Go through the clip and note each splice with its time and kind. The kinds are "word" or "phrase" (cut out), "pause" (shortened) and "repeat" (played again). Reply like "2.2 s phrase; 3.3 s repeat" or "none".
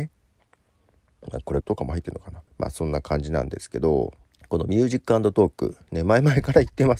1.6 s word; 2.5 s pause; 4.2 s pause